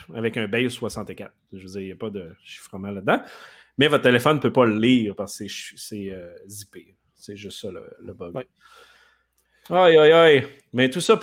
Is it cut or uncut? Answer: uncut